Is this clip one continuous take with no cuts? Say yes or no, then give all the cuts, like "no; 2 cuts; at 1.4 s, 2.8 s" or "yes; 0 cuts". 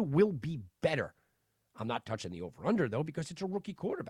yes; 0 cuts